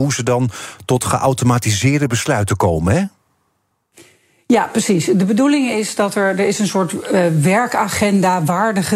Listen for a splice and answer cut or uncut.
uncut